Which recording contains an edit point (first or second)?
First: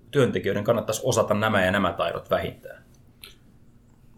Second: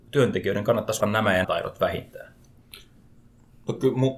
second